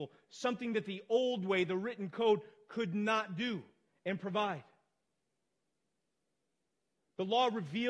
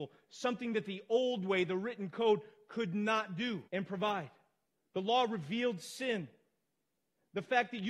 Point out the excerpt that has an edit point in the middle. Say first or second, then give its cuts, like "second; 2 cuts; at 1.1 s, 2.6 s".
second; 2 cuts; at 3.7 s, 4.6 s